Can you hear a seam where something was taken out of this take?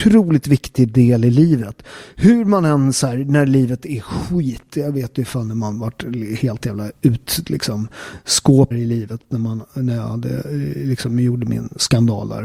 yes; 1 cut; at 8.7 s

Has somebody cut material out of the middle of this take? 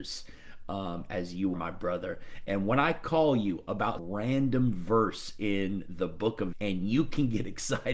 yes; 3 cuts; at 1.5 s, 4.0 s, 6.5 s

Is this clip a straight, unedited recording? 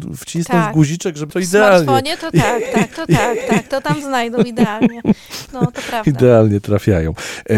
no; 2 cuts; at 1.3 s, 2.9 s

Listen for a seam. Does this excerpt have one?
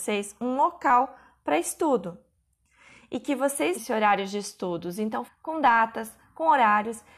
yes; 2 cuts; at 3.8 s, 5.3 s

